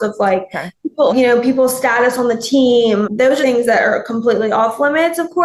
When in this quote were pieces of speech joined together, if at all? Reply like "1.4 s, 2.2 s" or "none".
1.1 s, 3.0 s, 3.4 s